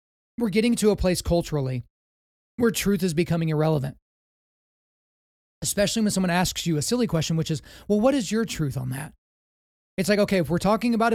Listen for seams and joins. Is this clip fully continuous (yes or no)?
yes